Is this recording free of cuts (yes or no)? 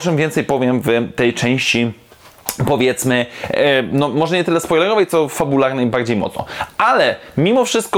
yes